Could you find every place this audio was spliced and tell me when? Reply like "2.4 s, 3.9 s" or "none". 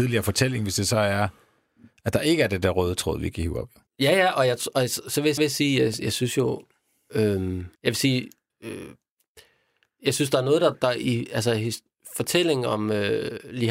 3.9 s, 5.4 s, 7.8 s, 8.5 s, 10.7 s

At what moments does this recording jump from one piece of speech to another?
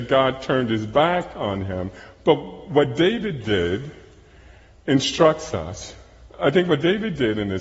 none

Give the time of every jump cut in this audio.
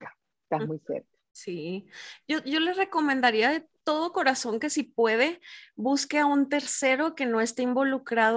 none

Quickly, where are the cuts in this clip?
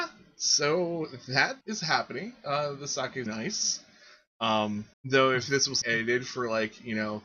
1.6 s, 3.3 s, 4.9 s, 5.8 s

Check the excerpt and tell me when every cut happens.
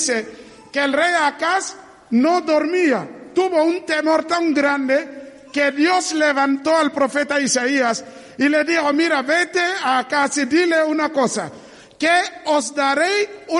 none

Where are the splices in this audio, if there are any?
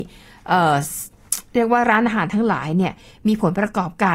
none

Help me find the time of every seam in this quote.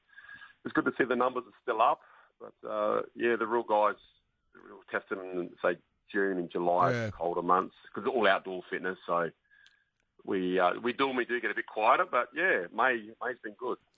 none

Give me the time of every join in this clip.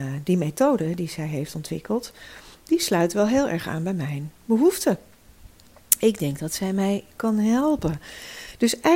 2.5 s

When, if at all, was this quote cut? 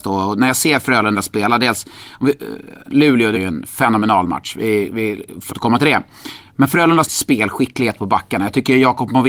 2.9 s, 3.3 s, 5.5 s, 7.0 s

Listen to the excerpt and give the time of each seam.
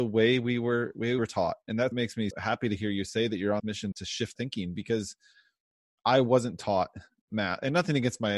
1.2 s, 1.9 s, 2.3 s, 3.6 s, 3.9 s, 4.4 s

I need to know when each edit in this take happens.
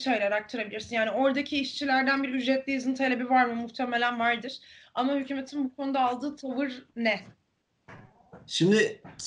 none

